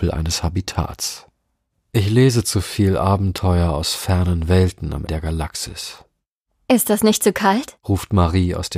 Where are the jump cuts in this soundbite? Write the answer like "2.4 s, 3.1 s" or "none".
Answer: 5.1 s